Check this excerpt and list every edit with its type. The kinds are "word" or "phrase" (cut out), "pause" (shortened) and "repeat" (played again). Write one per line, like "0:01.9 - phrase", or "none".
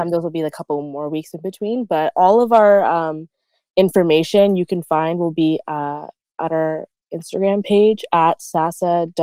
none